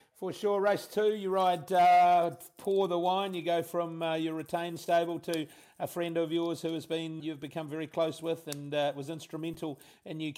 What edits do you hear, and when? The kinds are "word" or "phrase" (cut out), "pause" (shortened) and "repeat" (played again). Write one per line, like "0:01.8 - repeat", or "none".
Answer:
0:07.2 - word